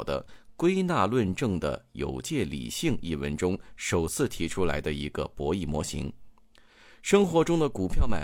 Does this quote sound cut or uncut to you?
uncut